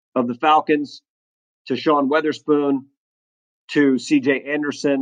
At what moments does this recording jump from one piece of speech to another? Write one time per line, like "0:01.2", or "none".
none